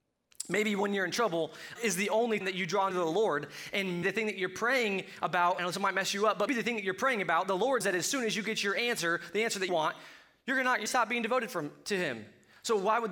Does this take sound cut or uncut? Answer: cut